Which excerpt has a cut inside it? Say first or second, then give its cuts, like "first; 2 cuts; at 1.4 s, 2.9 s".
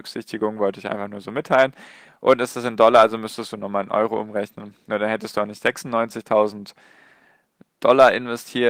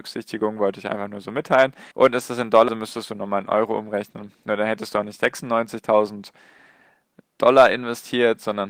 second; 2 cuts; at 1.9 s, 2.7 s